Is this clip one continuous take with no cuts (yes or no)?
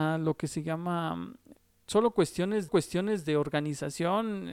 no